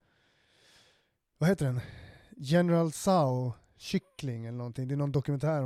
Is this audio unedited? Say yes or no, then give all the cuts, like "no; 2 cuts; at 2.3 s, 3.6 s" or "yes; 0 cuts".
yes; 0 cuts